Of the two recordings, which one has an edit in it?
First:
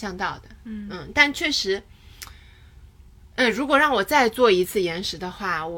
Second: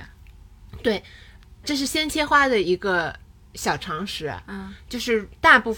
second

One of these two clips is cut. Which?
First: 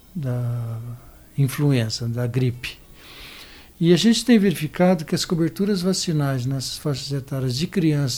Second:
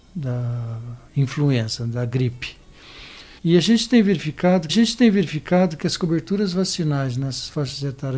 second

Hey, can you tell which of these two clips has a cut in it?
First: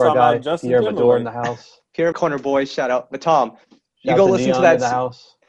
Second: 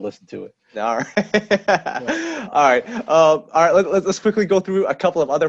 first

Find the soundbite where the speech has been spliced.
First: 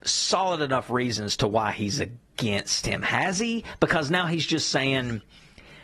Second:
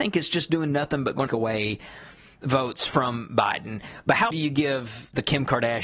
second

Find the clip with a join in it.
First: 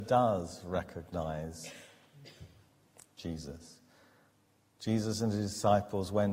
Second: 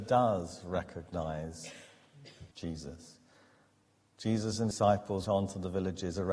second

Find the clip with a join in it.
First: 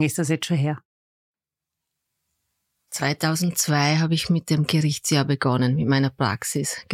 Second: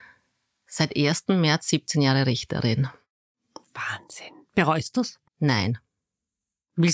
second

